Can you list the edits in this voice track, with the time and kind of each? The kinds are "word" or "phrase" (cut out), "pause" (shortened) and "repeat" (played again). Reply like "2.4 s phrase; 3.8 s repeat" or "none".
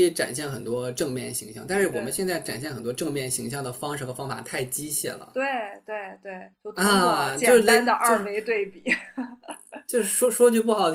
6.5 s pause